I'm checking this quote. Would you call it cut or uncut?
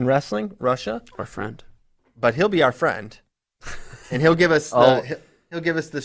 uncut